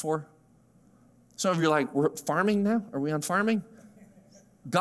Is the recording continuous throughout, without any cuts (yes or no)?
yes